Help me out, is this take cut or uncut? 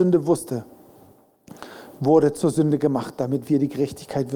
uncut